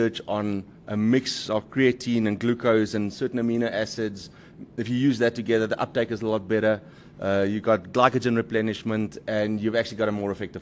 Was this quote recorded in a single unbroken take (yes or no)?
yes